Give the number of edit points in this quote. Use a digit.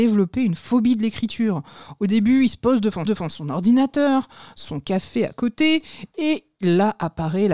1